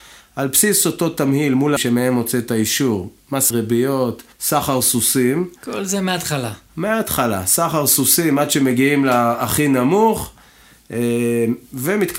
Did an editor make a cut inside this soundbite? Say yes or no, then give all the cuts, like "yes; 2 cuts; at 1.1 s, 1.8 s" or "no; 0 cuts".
yes; 3 cuts; at 1.8 s, 3.5 s, 4.3 s